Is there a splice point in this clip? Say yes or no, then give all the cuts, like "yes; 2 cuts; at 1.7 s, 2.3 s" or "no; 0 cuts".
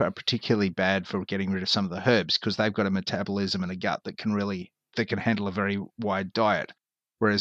yes; 1 cut; at 5.9 s